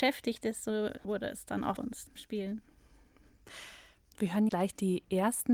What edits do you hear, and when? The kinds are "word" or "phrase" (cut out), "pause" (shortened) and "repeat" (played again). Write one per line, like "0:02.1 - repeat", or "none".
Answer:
0:01.0 - word
0:01.8 - word
0:02.2 - word
0:04.5 - word